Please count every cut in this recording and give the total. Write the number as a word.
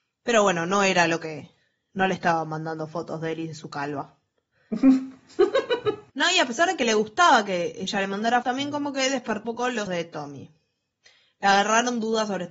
four